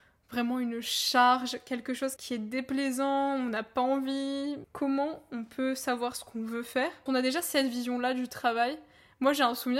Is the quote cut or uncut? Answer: cut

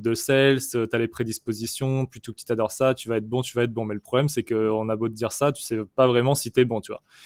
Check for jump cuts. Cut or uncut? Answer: uncut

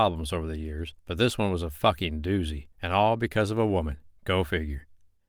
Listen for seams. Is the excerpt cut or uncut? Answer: cut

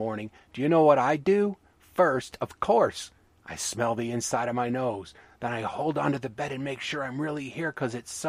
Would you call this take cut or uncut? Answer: uncut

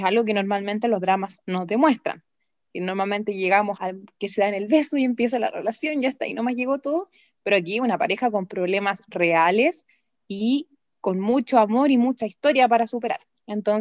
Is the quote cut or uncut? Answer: cut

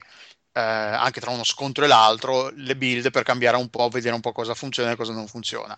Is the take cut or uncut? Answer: uncut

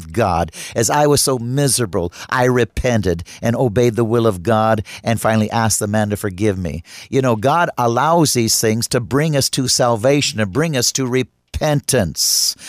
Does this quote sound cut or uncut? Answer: uncut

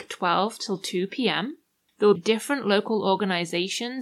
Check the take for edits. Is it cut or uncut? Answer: cut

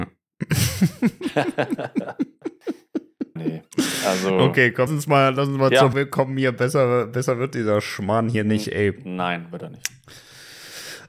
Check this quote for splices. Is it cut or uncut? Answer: cut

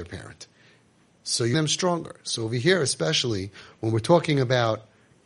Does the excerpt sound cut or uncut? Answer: cut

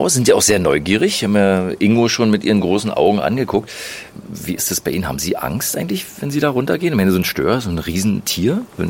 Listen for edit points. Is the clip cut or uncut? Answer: uncut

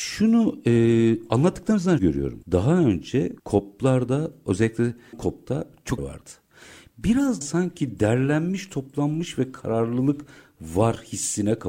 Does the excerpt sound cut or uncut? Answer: cut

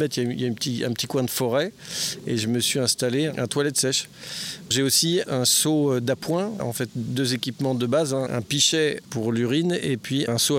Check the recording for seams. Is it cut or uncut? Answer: uncut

